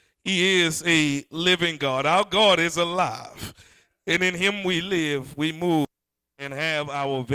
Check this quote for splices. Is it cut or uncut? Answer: uncut